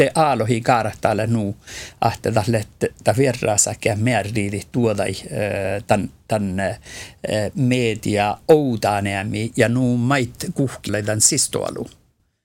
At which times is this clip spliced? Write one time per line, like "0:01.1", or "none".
0:10.9